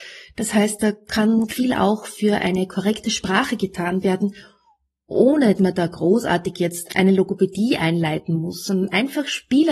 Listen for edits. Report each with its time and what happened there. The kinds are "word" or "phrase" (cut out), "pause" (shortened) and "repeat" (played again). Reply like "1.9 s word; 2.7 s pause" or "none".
1.5 s word; 5.6 s word; 6.9 s word